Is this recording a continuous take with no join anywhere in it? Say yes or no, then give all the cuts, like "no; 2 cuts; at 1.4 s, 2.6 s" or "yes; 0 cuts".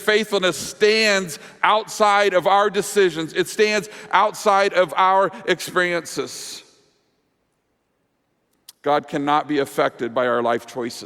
yes; 0 cuts